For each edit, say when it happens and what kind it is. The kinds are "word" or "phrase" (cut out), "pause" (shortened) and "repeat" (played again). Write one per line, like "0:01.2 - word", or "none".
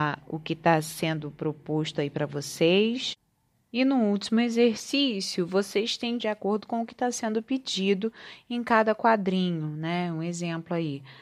0:03.5 - pause
0:06.2 - phrase